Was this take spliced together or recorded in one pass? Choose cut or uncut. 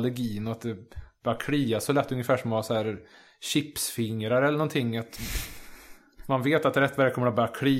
uncut